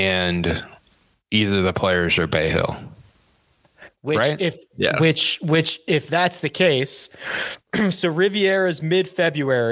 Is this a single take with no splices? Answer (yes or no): yes